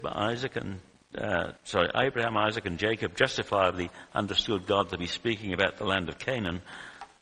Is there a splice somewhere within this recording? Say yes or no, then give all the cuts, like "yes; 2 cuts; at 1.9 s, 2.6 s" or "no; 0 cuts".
yes; 1 cut; at 1.6 s